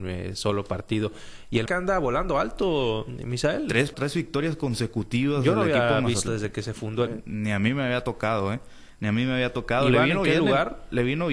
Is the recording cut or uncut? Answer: cut